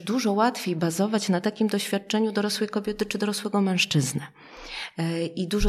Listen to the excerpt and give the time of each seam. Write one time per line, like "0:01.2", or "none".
none